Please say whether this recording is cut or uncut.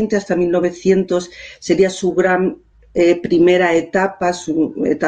uncut